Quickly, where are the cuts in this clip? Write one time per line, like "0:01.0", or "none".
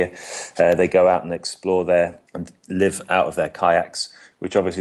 0:02.3